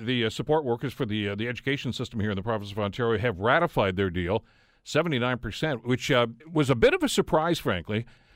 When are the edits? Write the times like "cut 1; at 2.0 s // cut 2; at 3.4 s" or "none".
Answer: cut 1; at 6.4 s